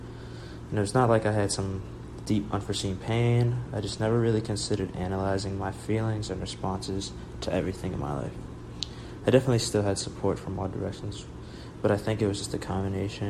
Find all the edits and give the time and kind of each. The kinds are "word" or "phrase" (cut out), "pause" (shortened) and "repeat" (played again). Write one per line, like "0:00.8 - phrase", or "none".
none